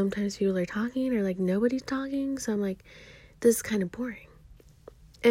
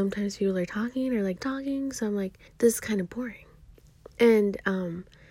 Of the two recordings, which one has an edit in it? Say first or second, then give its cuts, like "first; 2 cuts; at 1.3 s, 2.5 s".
second; 3 cuts; at 1.4 s, 2.5 s, 4.1 s